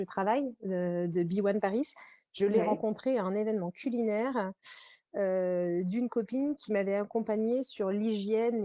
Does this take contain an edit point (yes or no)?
no